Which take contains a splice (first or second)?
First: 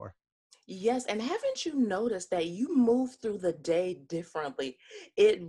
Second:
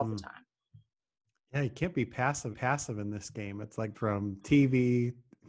second